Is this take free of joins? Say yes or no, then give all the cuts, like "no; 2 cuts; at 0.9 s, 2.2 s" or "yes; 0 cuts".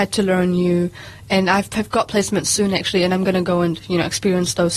yes; 0 cuts